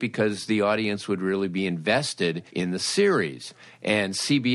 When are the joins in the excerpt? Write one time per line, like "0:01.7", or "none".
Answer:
0:02.5